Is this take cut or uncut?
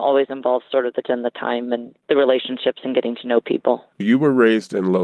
cut